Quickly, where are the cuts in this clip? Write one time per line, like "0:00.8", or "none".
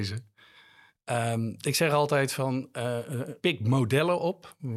0:03.4